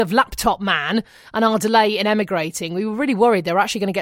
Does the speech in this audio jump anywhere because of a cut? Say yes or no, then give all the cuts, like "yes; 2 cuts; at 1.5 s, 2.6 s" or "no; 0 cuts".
no; 0 cuts